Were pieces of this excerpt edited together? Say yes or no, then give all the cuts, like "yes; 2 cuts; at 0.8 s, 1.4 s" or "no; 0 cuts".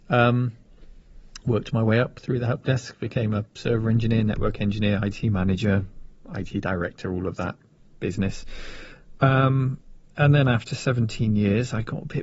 no; 0 cuts